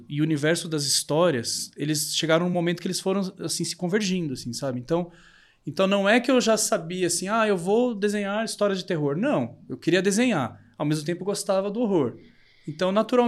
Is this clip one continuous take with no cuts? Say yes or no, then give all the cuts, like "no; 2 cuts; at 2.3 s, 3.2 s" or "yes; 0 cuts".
yes; 0 cuts